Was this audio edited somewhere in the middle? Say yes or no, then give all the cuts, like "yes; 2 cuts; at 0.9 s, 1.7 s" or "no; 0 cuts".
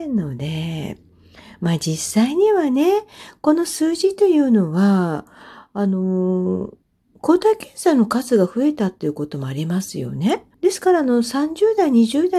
yes; 2 cuts; at 6.8 s, 10.5 s